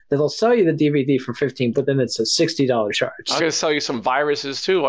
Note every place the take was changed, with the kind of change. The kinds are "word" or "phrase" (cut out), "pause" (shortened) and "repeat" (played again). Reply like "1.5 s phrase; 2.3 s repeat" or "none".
1.7 s word; 2.9 s word; 3.4 s word